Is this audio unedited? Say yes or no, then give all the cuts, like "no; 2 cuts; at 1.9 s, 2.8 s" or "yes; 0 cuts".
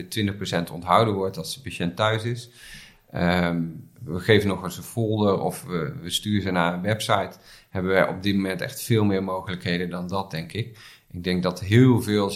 yes; 0 cuts